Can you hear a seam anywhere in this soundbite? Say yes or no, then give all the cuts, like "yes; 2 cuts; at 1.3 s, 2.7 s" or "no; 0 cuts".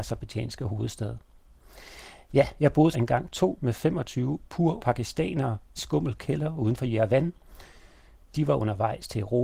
yes; 4 cuts; at 2.9 s, 3.6 s, 4.8 s, 5.8 s